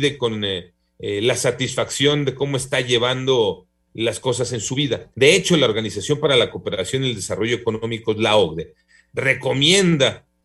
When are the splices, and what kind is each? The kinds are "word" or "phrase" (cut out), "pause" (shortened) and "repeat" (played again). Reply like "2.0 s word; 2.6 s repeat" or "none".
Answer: 5.1 s pause

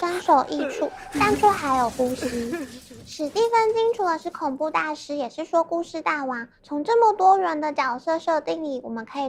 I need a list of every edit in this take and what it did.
6.6 s pause

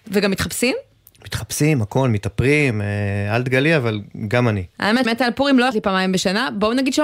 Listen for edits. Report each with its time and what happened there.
5.1 s word; 5.7 s word

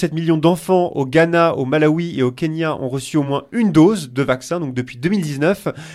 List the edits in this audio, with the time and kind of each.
none

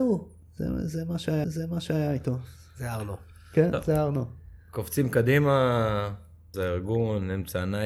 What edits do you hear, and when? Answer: 1.4 s repeat; 6.5 s phrase

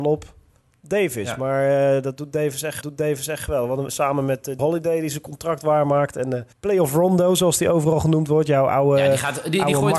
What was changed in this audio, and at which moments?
2.8 s repeat; 3.9 s word; 4.6 s word; 6.5 s pause

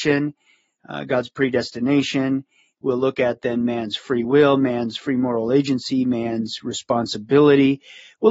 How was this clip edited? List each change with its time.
none

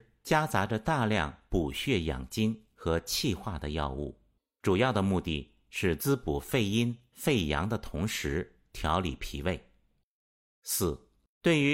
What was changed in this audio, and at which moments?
none

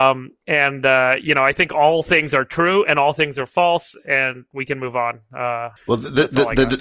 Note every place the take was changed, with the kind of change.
5.8 s pause

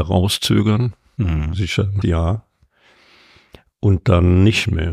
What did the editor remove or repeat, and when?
2.0 s word

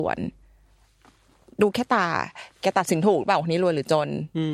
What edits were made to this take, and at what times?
2.5 s pause

